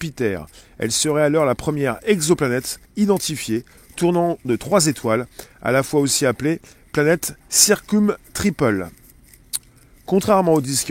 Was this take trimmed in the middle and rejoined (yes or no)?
yes